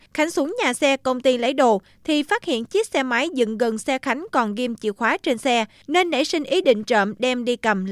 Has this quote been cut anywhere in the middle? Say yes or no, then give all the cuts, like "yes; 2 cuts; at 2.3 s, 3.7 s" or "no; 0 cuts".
no; 0 cuts